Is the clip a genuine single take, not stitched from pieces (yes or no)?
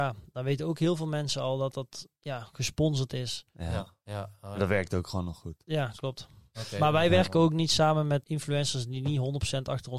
no